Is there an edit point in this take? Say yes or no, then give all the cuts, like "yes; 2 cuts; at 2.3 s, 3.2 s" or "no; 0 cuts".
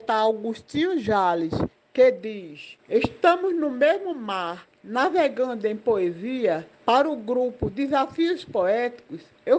yes; 3 cuts; at 2.8 s, 4.7 s, 6.7 s